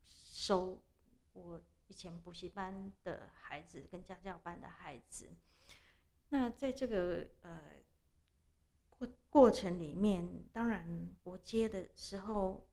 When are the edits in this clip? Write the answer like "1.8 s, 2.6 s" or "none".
10.5 s, 11.2 s